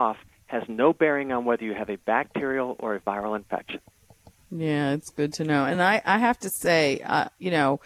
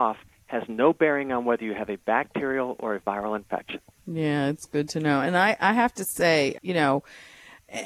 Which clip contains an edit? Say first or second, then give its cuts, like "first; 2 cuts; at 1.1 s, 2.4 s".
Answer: second; 2 cuts; at 4.0 s, 6.6 s